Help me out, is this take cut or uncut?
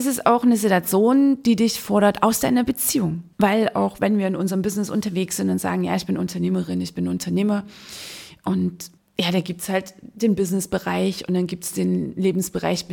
cut